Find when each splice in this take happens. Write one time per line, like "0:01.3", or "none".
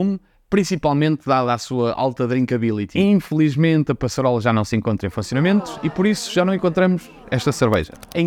none